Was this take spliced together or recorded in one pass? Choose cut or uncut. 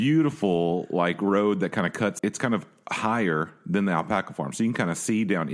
cut